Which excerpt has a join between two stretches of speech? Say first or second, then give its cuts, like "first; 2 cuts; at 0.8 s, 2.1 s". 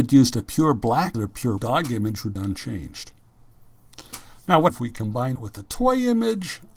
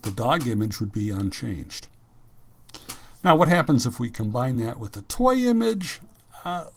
first; 5 cuts; at 1.1 s, 1.6 s, 2.4 s, 4.7 s, 5.4 s